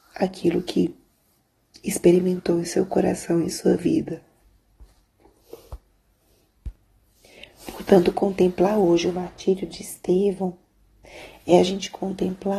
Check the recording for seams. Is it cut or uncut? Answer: uncut